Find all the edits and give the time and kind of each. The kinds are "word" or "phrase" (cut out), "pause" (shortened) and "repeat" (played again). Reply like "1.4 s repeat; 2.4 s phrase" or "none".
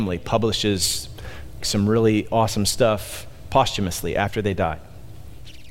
1.6 s word